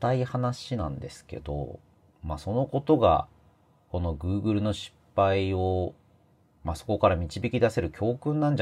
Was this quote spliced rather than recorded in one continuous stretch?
no; 0 cuts

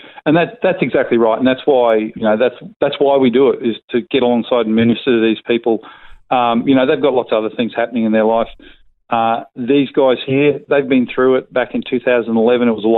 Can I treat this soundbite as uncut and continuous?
no; 1 cut; at 2.1 s

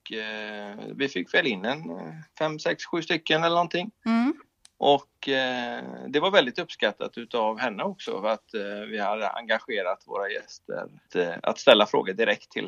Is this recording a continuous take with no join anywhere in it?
no; 2 cuts; at 2.3 s, 4.5 s

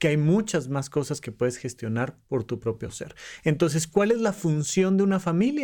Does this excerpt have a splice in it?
no; 0 cuts

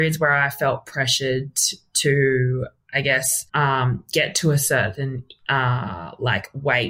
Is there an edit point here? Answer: yes; 1 cut; at 3.5 s

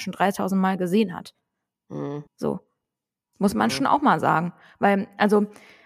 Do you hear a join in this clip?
yes; 1 cut; at 2.3 s

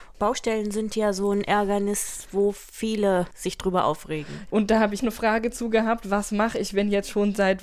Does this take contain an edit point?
yes; 1 cut; at 5.0 s

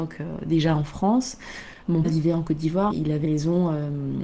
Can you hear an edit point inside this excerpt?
yes; 3 cuts; at 2.0 s, 2.9 s, 3.2 s

